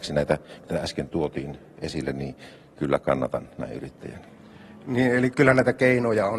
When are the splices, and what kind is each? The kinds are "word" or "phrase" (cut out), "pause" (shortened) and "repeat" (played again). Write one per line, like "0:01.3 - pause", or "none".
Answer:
0:05.3 - word

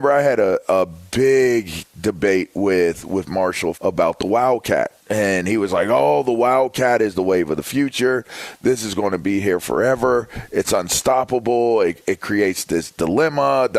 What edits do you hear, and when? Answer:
0:03.7 - word
0:05.0 - pause

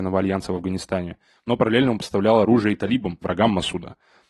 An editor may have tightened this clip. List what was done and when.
none

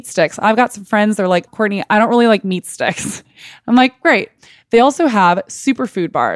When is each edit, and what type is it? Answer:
0:01.5 - word

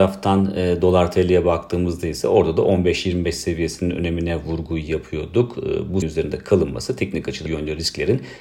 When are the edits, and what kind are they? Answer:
0:06.0 - word
0:07.5 - word

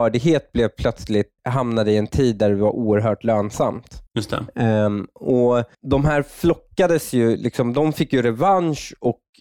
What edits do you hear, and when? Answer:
0:01.4 - pause
0:04.1 - pause
0:05.7 - pause

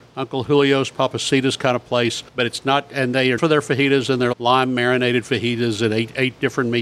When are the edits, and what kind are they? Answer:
0:02.3 - pause
0:03.4 - word
0:04.3 - word

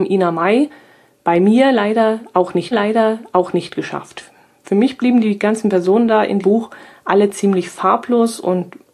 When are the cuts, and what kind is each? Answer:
0:02.7 - repeat
0:06.4 - word

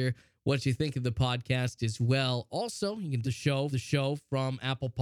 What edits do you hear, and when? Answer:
0:03.2 - word
0:03.7 - repeat

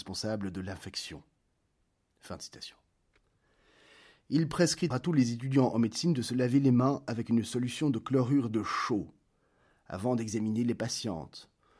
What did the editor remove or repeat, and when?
0:04.9 - word

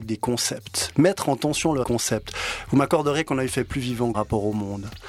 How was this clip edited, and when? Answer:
0:01.8 - phrase
0:04.1 - word

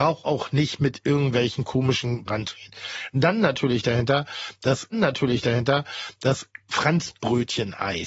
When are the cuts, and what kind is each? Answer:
0:02.3 - word
0:04.9 - repeat

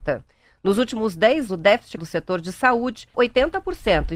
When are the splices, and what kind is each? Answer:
0:01.5 - word
0:02.0 - word
0:03.1 - word

